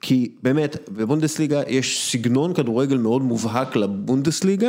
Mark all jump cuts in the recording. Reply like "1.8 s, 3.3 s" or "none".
none

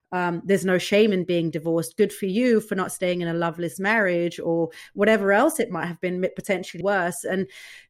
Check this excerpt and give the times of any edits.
6.8 s

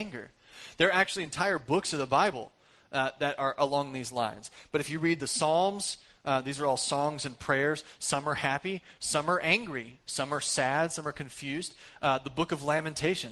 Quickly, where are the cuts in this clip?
none

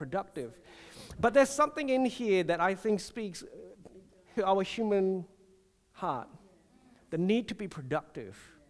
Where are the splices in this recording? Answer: 4.4 s

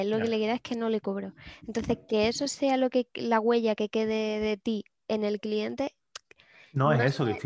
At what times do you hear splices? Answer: none

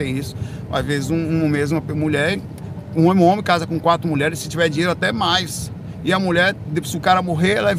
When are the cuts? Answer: none

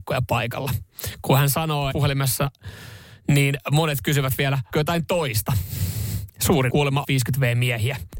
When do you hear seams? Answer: 1.9 s, 4.7 s, 6.7 s, 7.0 s

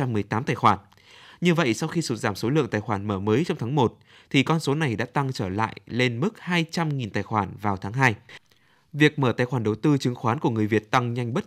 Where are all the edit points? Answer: none

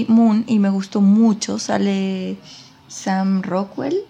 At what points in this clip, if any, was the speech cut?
none

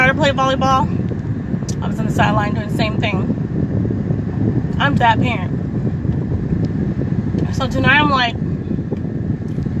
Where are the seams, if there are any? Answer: 5.0 s

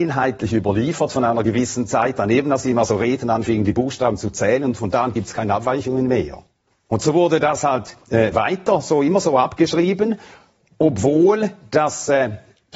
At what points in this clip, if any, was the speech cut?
none

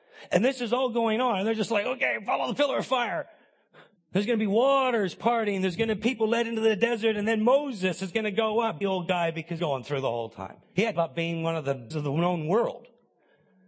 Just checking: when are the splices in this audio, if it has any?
4.0 s, 6.0 s, 8.8 s, 9.6 s, 10.6 s, 11.0 s, 11.9 s

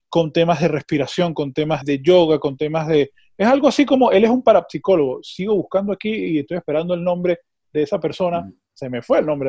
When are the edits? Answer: 1.8 s

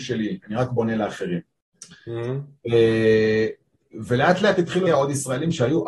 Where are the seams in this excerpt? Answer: 4.9 s

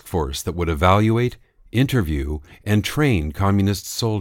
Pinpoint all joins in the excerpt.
none

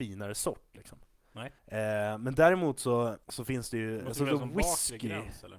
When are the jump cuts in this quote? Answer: 1.6 s, 3.2 s

